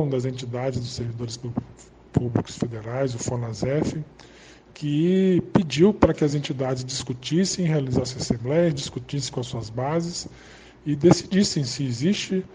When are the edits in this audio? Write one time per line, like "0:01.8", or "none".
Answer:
none